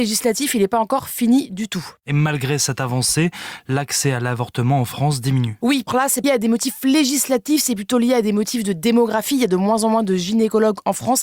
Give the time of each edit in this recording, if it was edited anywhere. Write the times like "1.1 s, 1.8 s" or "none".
5.9 s, 6.2 s